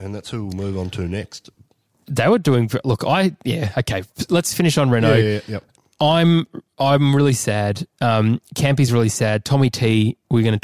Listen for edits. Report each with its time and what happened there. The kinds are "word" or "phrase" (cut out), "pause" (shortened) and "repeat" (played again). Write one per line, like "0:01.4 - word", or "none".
none